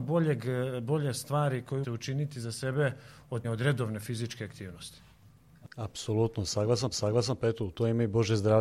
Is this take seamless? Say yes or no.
no